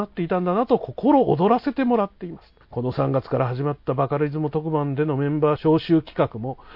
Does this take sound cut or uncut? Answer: cut